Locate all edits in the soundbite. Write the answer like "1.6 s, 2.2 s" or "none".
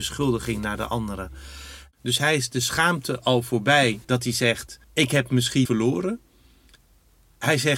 4.0 s, 4.8 s, 5.7 s

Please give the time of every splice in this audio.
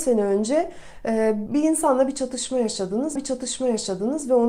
1.5 s, 3.2 s

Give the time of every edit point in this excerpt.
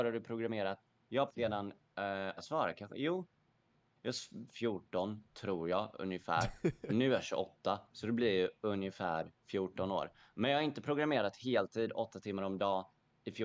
1.3 s, 2.4 s, 4.5 s

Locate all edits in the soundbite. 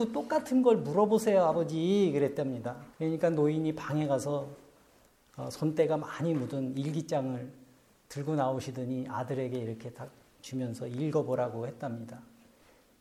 2.9 s

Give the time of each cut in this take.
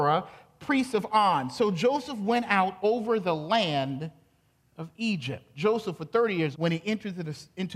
6.5 s

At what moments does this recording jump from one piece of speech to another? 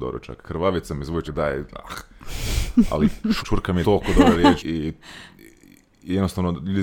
1.2 s, 3.4 s, 3.8 s, 4.6 s

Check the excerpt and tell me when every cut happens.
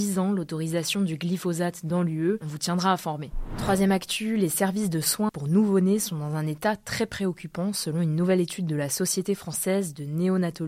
5.3 s

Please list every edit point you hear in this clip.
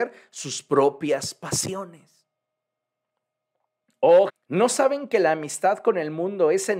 4.3 s

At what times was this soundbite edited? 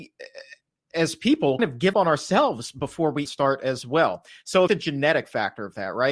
0.9 s, 1.6 s, 1.9 s, 3.2 s, 4.7 s

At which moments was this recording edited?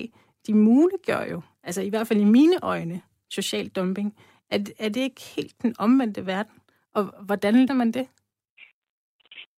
7.1 s, 7.7 s

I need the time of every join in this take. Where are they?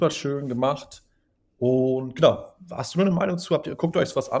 none

